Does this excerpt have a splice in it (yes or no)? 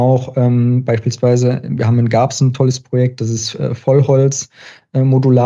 no